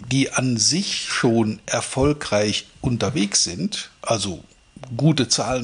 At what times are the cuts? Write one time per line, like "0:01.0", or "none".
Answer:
none